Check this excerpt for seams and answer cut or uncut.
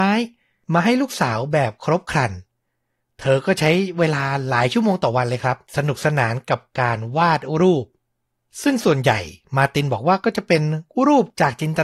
cut